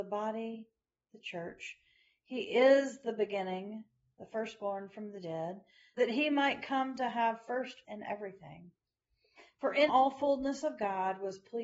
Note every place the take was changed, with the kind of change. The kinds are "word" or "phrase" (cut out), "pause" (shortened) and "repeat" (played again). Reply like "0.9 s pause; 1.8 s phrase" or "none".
6.0 s word; 7.8 s word; 9.9 s word